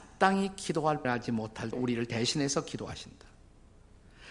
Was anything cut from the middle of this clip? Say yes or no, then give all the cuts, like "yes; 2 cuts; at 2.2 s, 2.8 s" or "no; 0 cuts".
yes; 2 cuts; at 1.0 s, 1.7 s